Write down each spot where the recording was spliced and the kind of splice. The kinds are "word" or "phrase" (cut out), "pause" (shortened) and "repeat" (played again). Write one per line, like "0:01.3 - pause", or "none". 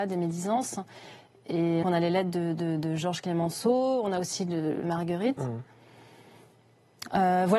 0:01.8 - word
0:04.8 - phrase